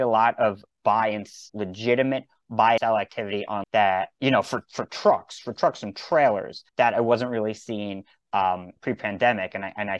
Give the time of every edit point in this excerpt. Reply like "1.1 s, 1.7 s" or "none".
1.5 s, 2.8 s, 3.6 s, 6.7 s, 8.8 s